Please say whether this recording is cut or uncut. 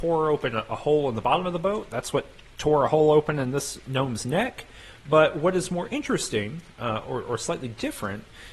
uncut